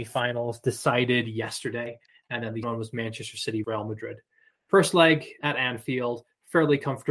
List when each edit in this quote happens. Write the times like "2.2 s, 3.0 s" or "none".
2.6 s, 3.6 s, 5.4 s